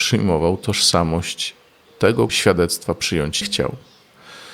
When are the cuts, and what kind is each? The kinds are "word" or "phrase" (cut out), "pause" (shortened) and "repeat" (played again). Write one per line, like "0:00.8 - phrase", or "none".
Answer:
0:02.3 - word
0:03.4 - word